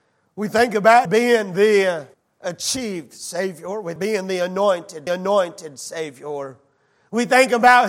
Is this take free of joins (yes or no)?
no